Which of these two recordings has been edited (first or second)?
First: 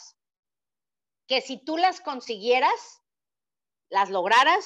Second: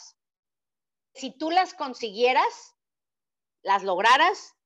second